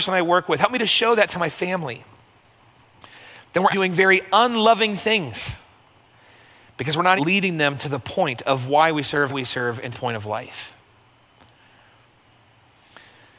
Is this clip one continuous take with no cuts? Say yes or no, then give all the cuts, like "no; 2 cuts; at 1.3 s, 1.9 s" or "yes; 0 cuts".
no; 4 cuts; at 3.7 s, 7.2 s, 9.3 s, 9.9 s